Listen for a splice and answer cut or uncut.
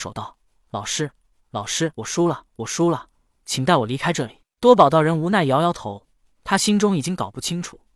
cut